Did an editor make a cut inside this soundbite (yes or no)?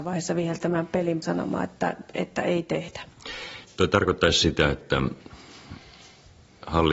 yes